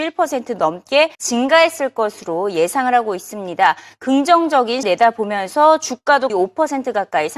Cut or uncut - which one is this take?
cut